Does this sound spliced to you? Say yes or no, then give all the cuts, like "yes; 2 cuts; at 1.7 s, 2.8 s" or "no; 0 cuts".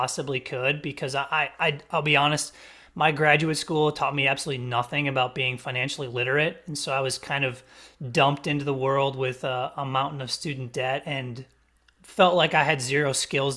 no; 0 cuts